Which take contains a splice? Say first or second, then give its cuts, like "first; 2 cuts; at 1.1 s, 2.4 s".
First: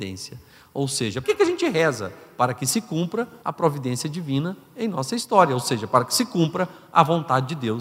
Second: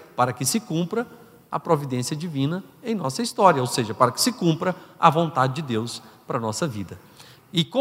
first; 2 cuts; at 1.2 s, 3.4 s